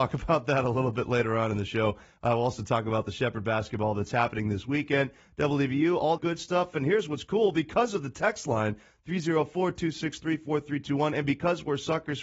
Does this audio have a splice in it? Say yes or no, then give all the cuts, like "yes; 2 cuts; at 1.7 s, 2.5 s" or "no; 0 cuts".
yes; 1 cut; at 6.2 s